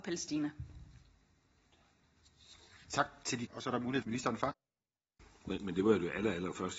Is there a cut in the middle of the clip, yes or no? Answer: yes